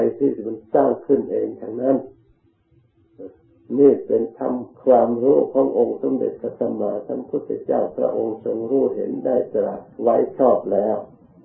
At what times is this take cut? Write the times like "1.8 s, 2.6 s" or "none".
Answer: 4.7 s, 9.9 s

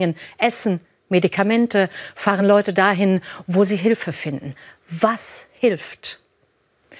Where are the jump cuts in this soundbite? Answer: none

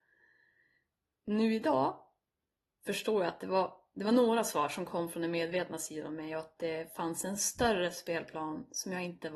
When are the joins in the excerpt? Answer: none

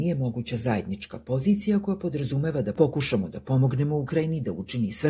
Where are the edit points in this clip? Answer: none

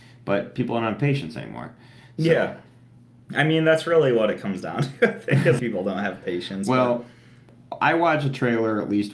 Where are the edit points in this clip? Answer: 5.6 s

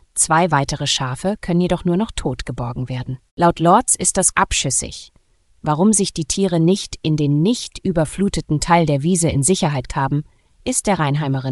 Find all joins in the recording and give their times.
3.3 s, 4.3 s, 9.9 s

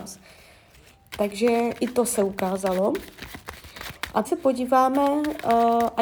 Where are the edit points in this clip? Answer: 4.2 s

